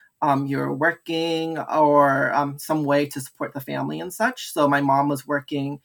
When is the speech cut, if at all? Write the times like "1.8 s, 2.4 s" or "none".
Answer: none